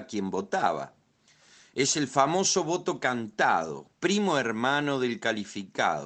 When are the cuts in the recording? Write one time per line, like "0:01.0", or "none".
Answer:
0:03.9